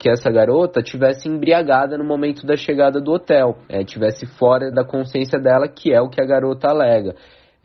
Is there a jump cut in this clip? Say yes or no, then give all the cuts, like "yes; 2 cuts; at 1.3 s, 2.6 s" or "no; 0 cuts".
yes; 2 cuts; at 3.6 s, 4.7 s